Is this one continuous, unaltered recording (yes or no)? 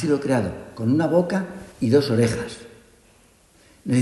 no